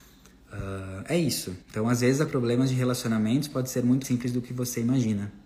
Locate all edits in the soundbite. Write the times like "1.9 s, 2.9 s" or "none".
1.6 s, 2.3 s, 4.0 s